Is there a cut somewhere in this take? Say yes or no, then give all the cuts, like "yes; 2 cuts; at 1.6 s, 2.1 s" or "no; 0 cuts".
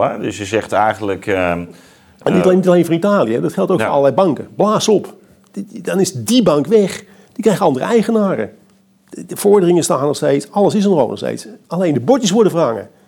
no; 0 cuts